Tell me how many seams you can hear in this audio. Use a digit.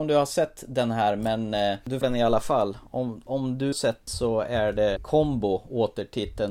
4